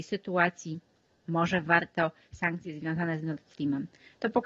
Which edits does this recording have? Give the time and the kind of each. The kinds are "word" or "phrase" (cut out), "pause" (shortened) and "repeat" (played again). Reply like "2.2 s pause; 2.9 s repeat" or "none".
2.3 s word